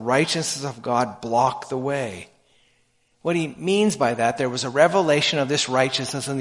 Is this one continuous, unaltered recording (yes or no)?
yes